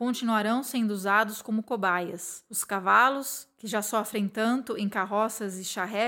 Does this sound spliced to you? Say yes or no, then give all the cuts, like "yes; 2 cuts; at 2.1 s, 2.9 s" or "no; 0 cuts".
no; 0 cuts